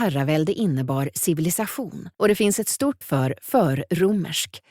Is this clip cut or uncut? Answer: cut